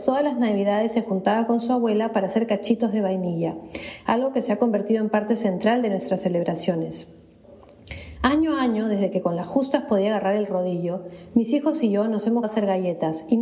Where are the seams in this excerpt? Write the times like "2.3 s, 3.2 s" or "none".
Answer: 12.4 s